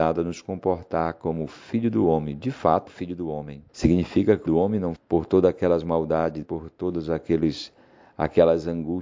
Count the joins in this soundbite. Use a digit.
5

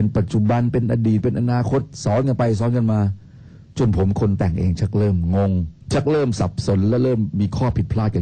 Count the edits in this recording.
1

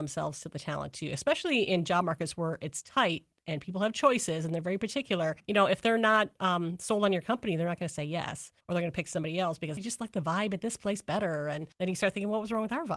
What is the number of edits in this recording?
4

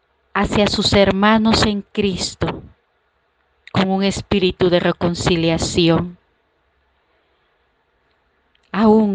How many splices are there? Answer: 0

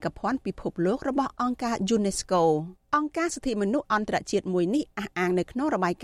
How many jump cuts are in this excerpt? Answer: 1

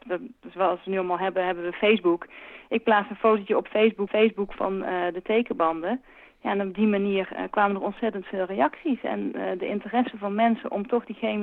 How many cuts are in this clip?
1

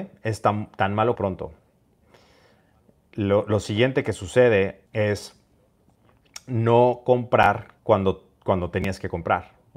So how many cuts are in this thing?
3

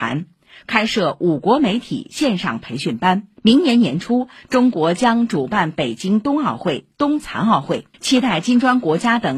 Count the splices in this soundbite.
2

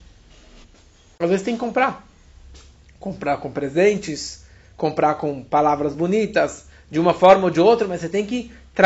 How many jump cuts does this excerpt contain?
0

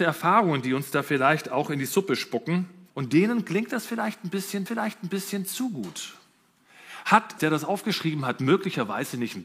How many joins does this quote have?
3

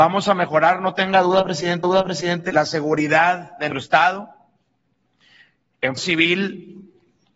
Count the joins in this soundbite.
3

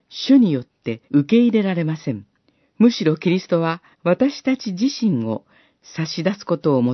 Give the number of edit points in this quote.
3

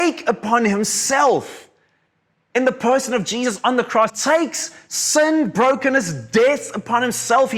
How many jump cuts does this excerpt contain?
1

